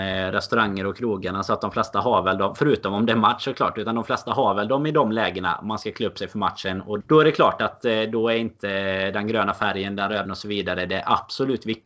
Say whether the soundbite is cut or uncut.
cut